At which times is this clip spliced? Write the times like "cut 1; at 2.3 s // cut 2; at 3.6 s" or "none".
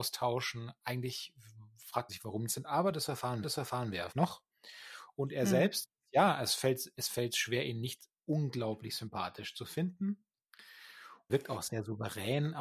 cut 1; at 2.1 s // cut 2; at 2.5 s // cut 3; at 3.4 s // cut 4; at 4.1 s // cut 5; at 8.1 s // cut 6; at 11.3 s